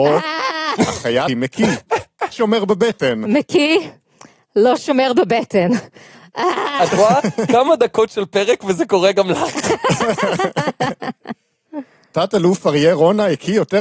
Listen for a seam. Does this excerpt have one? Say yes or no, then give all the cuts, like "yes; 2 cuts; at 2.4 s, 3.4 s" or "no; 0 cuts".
yes; 2 cuts; at 1.3 s, 2.3 s